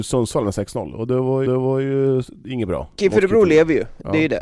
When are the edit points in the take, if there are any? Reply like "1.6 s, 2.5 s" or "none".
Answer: 1.5 s

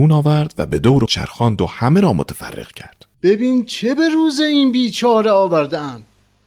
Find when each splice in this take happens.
1.1 s, 3.1 s

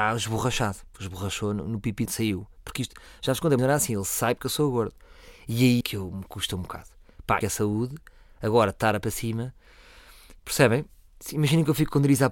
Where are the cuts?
0.9 s, 2.1 s, 3.6 s, 5.8 s, 7.4 s, 9.0 s

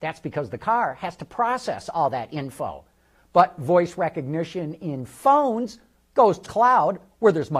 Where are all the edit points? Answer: 6.5 s

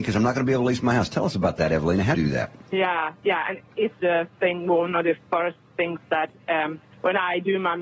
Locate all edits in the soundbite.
2.1 s, 2.6 s, 4.0 s

